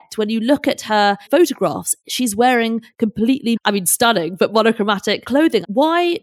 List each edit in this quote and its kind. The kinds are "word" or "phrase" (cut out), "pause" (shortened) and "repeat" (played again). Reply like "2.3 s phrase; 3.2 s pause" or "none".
1.3 s word; 3.6 s word